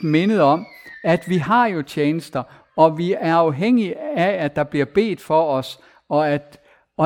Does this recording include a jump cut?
no; 0 cuts

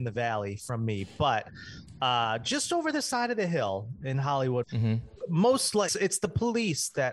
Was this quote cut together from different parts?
yes; 2 cuts; at 4.6 s, 5.9 s

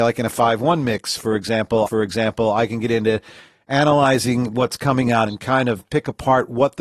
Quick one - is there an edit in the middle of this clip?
yes; 2 cuts; at 1.9 s, 5.3 s

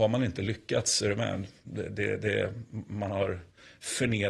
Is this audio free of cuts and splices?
yes; 0 cuts

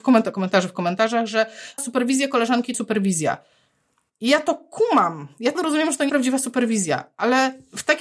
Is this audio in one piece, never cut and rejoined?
no; 4 cuts; at 1.8 s, 2.7 s, 5.5 s, 6.1 s

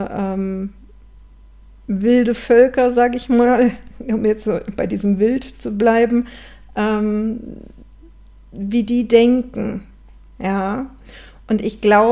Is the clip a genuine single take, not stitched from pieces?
yes; 0 cuts

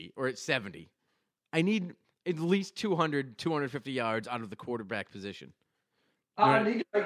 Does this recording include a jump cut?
no; 0 cuts

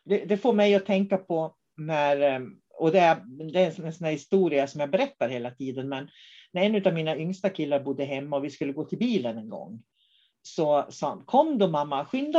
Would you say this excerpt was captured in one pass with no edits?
yes; 0 cuts

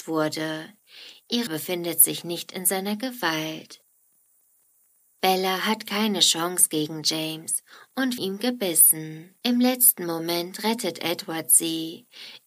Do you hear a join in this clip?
yes; 3 cuts; at 1.5 s, 8.2 s, 9.4 s

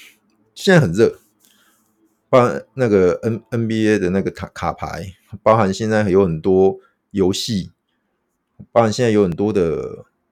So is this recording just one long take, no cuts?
yes; 0 cuts

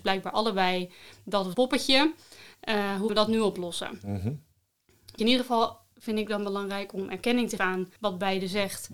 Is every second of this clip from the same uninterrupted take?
no; 5 cuts; at 1.5 s, 3.1 s, 5.2 s, 7.6 s, 8.0 s

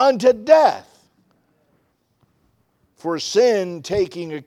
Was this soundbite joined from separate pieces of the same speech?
no; 0 cuts

